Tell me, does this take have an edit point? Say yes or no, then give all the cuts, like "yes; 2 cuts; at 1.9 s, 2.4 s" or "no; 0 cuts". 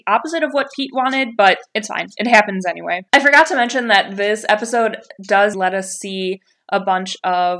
yes; 2 cuts; at 3.1 s, 5.5 s